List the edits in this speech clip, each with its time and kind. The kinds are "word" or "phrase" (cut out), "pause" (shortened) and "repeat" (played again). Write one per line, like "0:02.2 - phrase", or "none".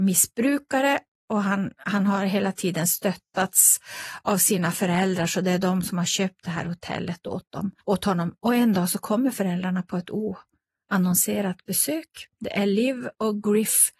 0:07.8 - pause